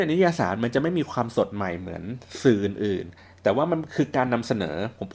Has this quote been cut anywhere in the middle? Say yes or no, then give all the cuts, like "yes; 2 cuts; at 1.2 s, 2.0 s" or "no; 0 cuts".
yes; 1 cut; at 3.2 s